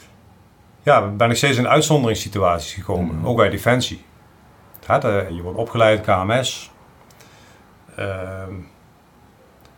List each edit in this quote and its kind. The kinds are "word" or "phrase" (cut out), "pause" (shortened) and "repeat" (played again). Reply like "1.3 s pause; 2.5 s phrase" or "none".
3.4 s word; 5.3 s word

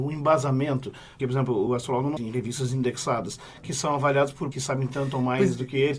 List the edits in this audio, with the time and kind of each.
1.2 s word; 1.7 s word; 2.2 s phrase; 4.5 s word

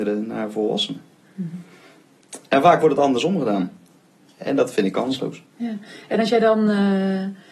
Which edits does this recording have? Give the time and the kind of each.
none

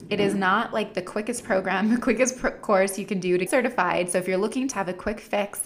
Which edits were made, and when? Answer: 3.5 s word; 4.7 s word

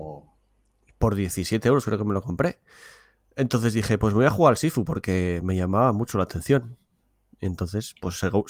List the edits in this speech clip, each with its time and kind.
none

